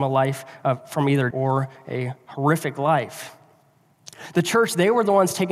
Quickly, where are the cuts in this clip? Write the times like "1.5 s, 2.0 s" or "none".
1.3 s